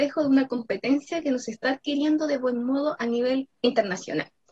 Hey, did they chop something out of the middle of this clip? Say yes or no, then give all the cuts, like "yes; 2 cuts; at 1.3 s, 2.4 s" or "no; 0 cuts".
yes; 1 cut; at 3.5 s